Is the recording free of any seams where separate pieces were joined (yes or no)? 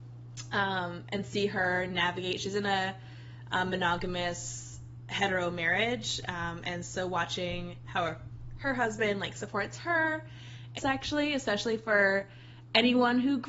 no